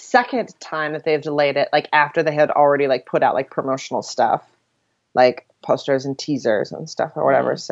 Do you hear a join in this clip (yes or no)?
no